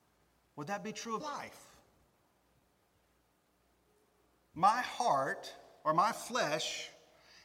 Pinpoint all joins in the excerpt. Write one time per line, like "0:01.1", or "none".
0:01.2